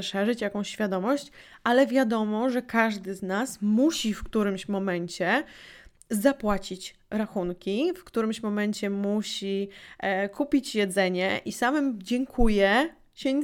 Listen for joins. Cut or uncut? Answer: uncut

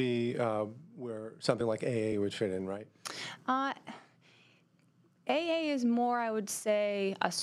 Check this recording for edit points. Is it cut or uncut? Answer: uncut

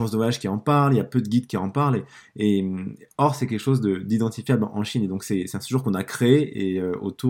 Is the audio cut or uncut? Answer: uncut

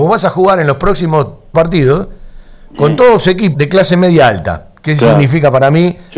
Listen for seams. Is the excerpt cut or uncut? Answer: cut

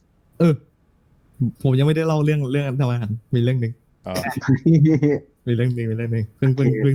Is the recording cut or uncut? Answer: cut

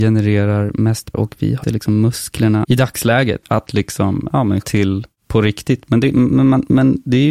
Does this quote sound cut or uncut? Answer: cut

